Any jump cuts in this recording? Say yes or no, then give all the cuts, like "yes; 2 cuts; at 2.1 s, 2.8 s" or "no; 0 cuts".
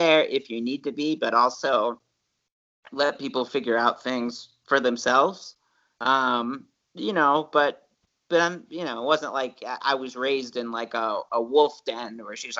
no; 0 cuts